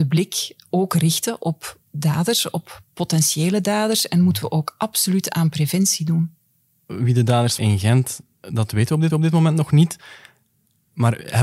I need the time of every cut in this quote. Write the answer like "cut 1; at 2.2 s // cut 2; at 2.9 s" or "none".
cut 1; at 7.6 s // cut 2; at 9.1 s